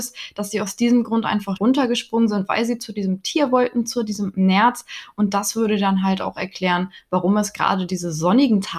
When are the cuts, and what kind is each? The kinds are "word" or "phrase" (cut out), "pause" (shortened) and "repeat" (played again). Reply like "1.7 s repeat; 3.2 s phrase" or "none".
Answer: 1.6 s word

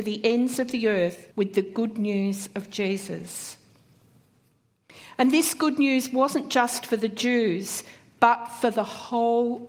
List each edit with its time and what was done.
1.3 s pause

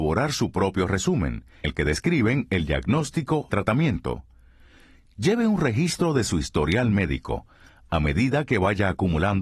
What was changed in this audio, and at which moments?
1.6 s word; 3.5 s phrase

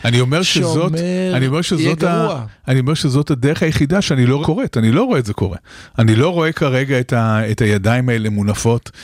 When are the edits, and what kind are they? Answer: 4.4 s word

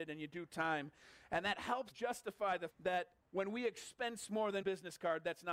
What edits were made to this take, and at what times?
1.9 s phrase; 2.7 s word; 3.2 s word; 4.6 s phrase

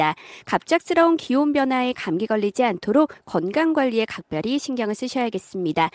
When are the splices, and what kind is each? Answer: none

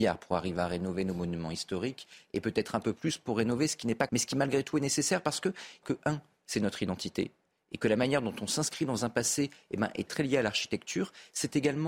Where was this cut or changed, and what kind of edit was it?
4.1 s word; 5.8 s phrase; 10.1 s word

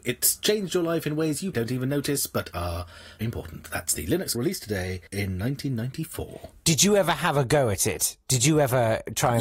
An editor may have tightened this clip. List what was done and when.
1.5 s word; 3.2 s word; 4.3 s word; 5.1 s pause

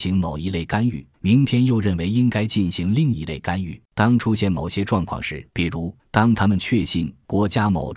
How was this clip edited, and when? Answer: 1.1 s pause; 3.9 s pause; 5.5 s pause; 6.0 s pause

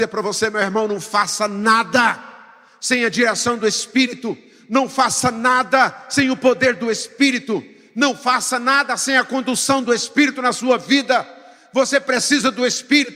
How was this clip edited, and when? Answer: none

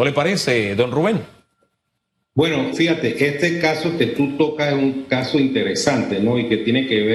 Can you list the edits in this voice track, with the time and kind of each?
2.7 s word

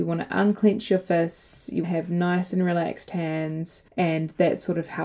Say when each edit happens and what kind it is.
1.8 s word; 3.9 s pause

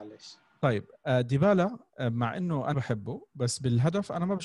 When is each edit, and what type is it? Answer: 2.7 s word

